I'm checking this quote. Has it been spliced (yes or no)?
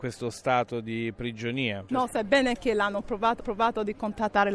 yes